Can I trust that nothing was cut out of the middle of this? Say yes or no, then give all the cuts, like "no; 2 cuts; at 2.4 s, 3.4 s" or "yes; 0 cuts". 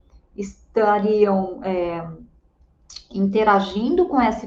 yes; 0 cuts